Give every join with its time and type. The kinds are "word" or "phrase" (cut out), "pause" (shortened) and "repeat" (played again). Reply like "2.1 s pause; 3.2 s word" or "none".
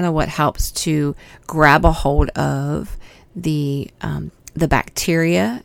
none

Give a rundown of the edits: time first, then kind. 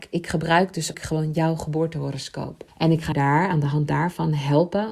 0.9 s word; 2.7 s pause; 3.1 s word

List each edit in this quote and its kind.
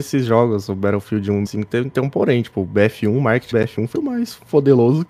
1.5 s word; 3.5 s word; 3.9 s word

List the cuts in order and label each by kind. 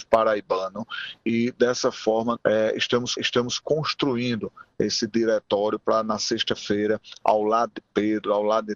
2.4 s word; 3.2 s repeat

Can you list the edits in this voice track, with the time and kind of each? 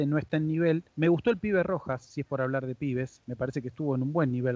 0.9 s pause

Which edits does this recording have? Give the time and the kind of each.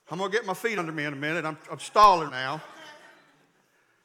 2.3 s word

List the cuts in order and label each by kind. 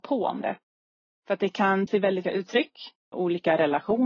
1.9 s word; 2.2 s phrase; 3.0 s pause

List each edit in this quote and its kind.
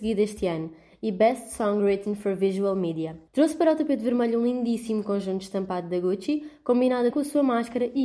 3.3 s pause; 7.1 s word

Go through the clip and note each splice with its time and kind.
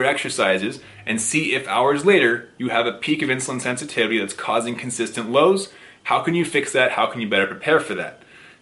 none

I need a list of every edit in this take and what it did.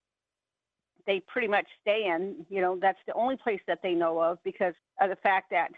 4.8 s pause

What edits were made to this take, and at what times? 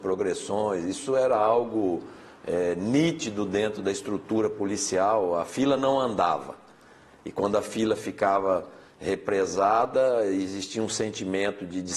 none

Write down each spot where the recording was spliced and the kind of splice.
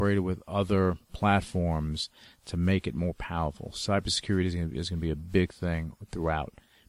none

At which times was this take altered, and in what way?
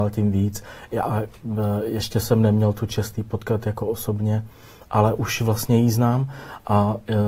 none

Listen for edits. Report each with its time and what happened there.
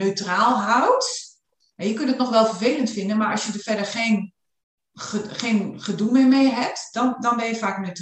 none

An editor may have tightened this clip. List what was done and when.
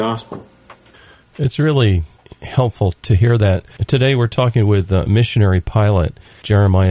none

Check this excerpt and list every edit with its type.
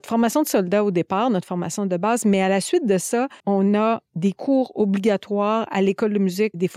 3.4 s pause

